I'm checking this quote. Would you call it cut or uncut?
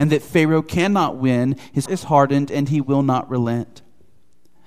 cut